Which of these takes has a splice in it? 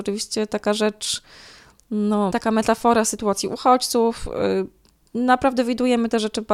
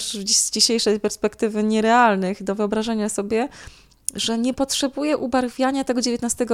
first; 1 cut; at 2.3 s

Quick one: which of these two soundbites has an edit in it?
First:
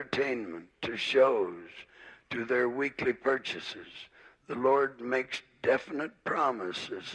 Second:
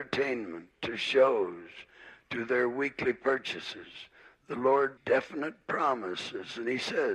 second; 1 cut; at 5.0 s

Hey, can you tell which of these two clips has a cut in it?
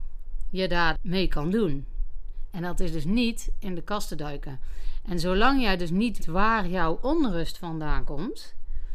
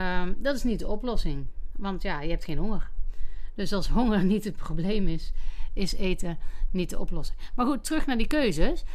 first; 2 cuts; at 0.9 s, 6.2 s

